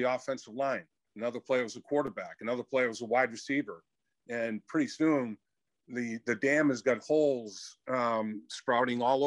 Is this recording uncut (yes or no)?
yes